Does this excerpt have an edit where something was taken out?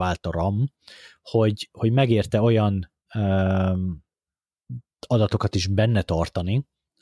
no; 0 cuts

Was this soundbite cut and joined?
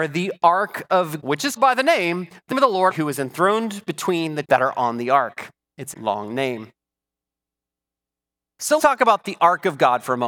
yes; 7 cuts; at 1.2 s, 1.6 s, 2.5 s, 2.9 s, 4.4 s, 5.9 s, 8.8 s

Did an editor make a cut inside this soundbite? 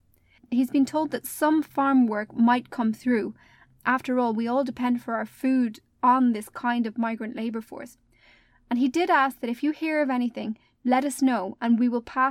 no; 0 cuts

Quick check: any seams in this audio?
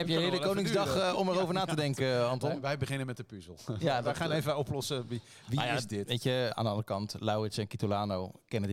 yes; 1 cut; at 6.5 s

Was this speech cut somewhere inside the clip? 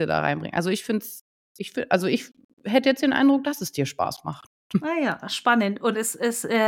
no; 0 cuts

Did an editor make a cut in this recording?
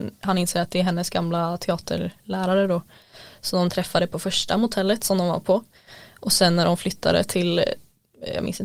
no; 0 cuts

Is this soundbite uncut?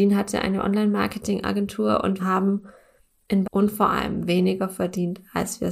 no; 2 cuts; at 2.2 s, 3.4 s

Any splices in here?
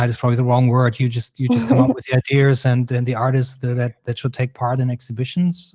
no; 0 cuts

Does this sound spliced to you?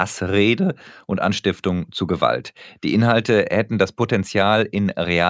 no; 0 cuts

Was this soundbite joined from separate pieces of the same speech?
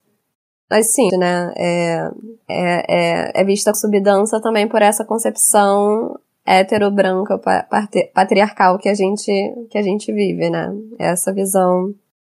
yes; 3 cuts; at 1.1 s, 2.4 s, 3.7 s

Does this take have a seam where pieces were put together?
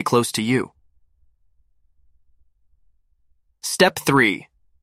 no; 0 cuts

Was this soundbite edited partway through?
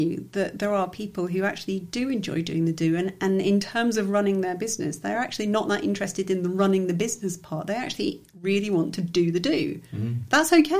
no; 0 cuts

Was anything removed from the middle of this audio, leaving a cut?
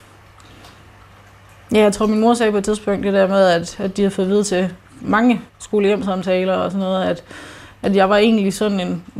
yes; 1 cut; at 5.5 s

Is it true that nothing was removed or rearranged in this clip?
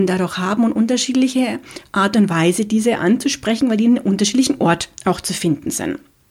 yes; 0 cuts

